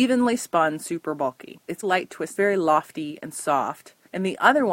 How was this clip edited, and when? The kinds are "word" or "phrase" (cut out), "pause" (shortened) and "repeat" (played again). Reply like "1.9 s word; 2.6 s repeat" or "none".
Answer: 1.8 s phrase; 2.3 s phrase